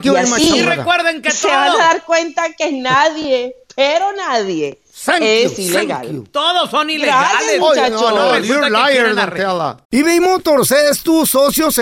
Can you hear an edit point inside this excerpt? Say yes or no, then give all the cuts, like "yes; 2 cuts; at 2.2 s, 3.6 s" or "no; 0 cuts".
no; 0 cuts